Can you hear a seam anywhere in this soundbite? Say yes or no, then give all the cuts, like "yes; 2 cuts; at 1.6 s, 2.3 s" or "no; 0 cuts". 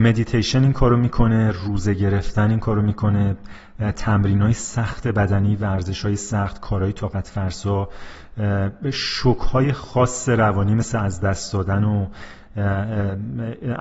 no; 0 cuts